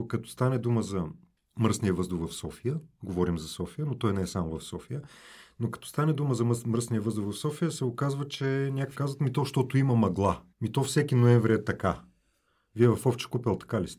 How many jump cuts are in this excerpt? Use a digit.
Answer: 3